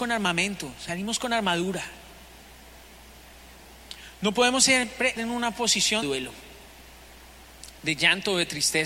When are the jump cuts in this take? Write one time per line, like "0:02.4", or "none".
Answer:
0:05.2
0:06.0